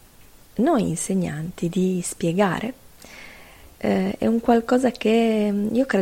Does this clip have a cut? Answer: no; 0 cuts

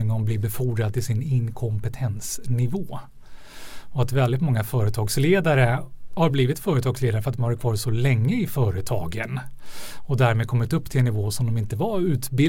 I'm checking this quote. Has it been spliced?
no; 0 cuts

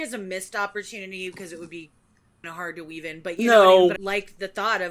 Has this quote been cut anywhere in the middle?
yes; 2 cuts; at 2.4 s, 4.0 s

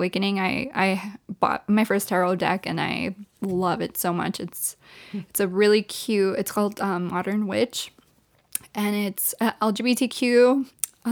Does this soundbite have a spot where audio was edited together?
no; 0 cuts

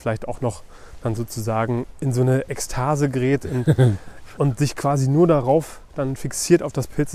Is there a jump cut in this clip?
yes; 1 cut; at 4.4 s

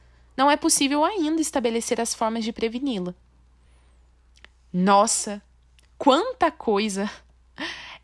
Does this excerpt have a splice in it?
no; 0 cuts

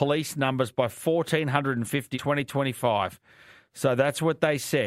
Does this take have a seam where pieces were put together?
yes; 1 cut; at 2.1 s

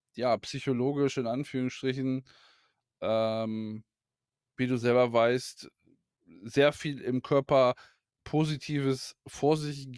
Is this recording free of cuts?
yes; 0 cuts

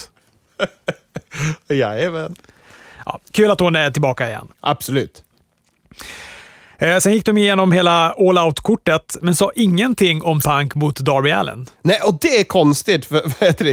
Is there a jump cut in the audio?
yes; 3 cuts; at 4.5 s, 10.4 s, 11.7 s

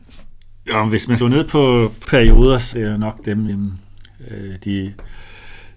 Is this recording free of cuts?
no; 4 cuts; at 1.2 s, 2.0 s, 2.7 s, 3.5 s

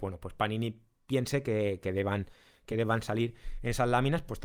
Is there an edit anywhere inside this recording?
no; 0 cuts

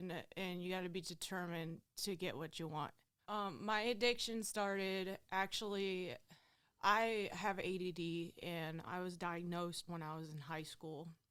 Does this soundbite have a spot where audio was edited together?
yes; 4 cuts; at 3.2 s, 6.5 s, 8.8 s, 9.9 s

